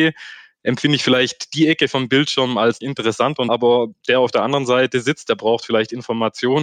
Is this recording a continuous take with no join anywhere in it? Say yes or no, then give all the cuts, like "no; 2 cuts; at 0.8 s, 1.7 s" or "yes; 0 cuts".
no; 2 cuts; at 2.8 s, 3.5 s